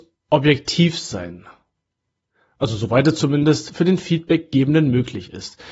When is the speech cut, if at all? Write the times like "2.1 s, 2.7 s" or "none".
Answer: none